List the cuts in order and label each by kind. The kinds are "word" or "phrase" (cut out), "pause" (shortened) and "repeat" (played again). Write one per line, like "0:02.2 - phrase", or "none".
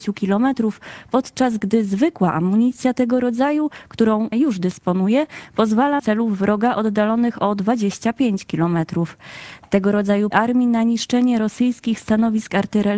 0:04.3 - word
0:06.0 - phrase
0:10.3 - phrase